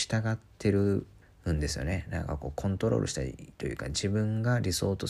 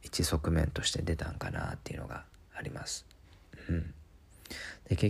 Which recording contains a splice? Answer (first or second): first